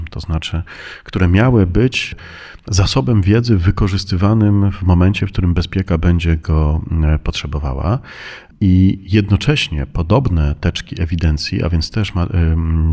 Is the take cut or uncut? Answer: uncut